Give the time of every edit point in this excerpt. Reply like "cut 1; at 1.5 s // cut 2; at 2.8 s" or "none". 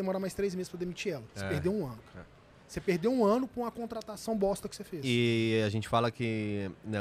none